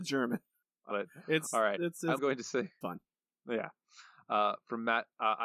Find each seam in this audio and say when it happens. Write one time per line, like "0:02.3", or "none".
0:00.9
0:02.2
0:02.8